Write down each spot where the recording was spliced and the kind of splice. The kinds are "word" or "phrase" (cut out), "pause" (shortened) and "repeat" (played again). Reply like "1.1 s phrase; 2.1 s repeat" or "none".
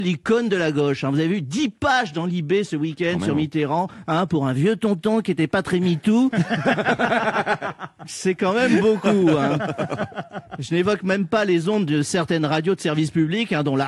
none